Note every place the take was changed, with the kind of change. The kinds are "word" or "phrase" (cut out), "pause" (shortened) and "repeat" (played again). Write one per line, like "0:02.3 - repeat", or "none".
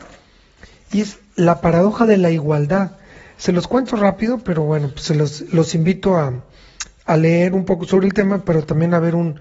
none